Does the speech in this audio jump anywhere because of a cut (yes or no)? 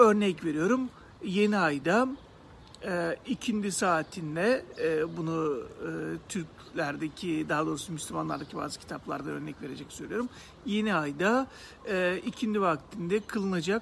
no